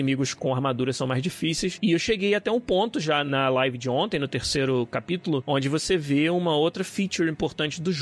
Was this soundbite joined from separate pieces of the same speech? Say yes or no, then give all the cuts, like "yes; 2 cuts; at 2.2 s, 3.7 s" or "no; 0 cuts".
no; 0 cuts